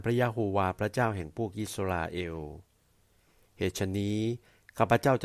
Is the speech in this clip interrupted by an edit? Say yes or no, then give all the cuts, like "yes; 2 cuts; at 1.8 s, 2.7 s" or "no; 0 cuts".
no; 0 cuts